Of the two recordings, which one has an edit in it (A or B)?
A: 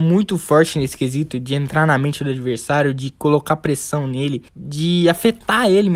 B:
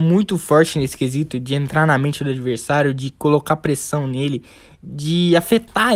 A